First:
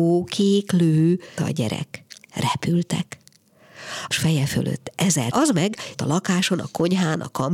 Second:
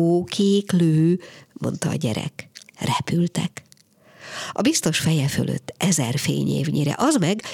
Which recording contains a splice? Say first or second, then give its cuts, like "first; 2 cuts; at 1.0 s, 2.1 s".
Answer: first; 4 cuts; at 1.4 s, 4.1 s, 5.3 s, 5.9 s